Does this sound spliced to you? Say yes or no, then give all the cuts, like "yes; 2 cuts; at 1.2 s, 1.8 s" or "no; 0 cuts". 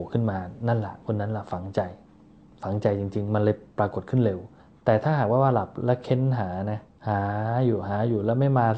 yes; 2 cuts; at 4.6 s, 6.9 s